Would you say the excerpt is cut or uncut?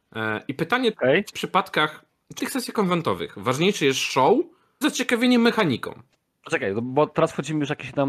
cut